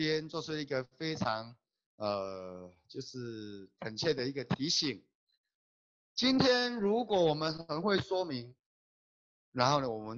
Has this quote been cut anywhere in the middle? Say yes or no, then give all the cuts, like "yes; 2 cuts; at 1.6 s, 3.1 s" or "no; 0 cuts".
no; 0 cuts